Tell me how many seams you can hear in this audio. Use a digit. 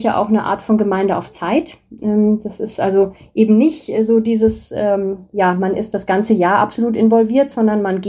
0